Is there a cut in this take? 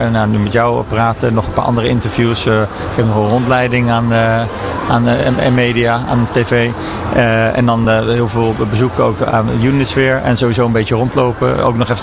no; 0 cuts

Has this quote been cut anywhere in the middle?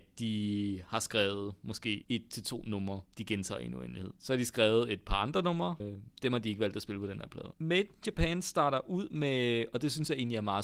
yes; 1 cut; at 5.8 s

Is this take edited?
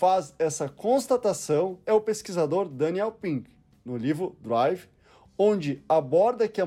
no; 0 cuts

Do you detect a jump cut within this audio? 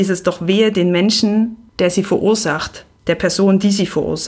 no; 0 cuts

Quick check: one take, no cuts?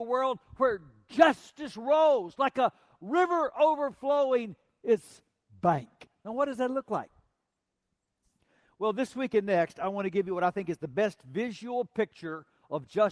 yes; 0 cuts

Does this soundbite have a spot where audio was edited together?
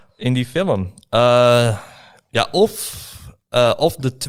no; 0 cuts

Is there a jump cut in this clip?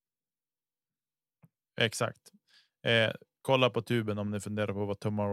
no; 0 cuts

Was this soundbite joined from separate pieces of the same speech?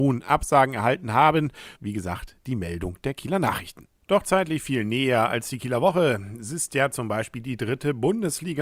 yes; 1 cut; at 1.7 s

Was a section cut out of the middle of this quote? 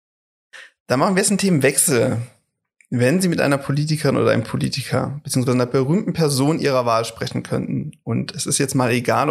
no; 0 cuts

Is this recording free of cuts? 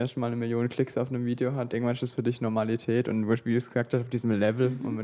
no; 1 cut; at 1.7 s

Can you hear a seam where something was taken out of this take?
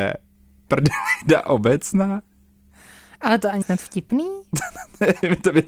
yes; 1 cut; at 3.6 s

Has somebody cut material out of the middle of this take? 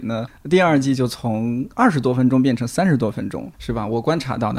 yes; 1 cut; at 3.5 s

